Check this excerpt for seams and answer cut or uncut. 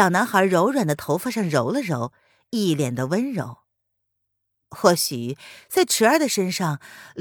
uncut